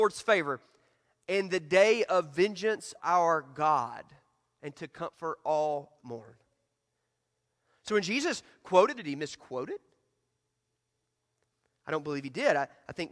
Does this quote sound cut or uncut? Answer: cut